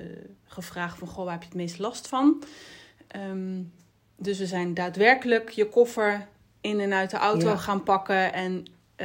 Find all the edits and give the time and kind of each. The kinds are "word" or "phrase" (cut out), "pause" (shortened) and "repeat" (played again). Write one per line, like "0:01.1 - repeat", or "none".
none